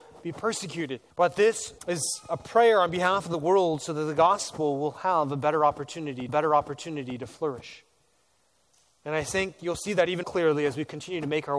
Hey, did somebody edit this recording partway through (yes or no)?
yes